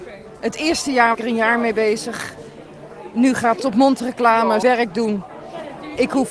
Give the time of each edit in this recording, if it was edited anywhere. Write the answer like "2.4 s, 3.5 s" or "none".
1.1 s, 3.6 s, 4.6 s